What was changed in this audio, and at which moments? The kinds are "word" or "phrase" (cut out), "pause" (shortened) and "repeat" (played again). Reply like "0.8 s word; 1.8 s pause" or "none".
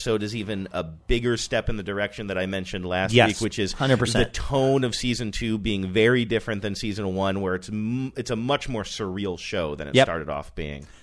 none